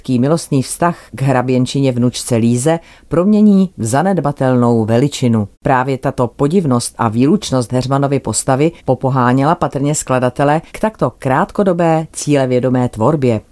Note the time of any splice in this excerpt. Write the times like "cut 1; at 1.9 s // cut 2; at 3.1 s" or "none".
cut 1; at 1.1 s // cut 2; at 5.5 s // cut 3; at 8.8 s // cut 4; at 10.7 s